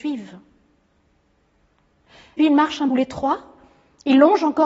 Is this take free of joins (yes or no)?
no